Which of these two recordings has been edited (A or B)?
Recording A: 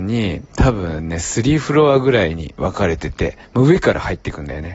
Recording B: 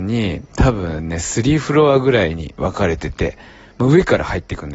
A